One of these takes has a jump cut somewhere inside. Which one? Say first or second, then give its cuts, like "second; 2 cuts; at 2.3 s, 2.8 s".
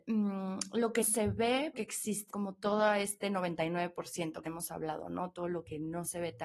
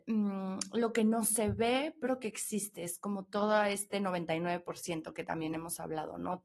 first; 4 cuts; at 1.0 s, 1.7 s, 2.3 s, 4.5 s